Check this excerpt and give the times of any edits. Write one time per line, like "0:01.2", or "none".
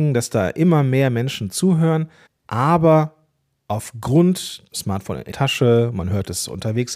0:02.3
0:04.7
0:05.3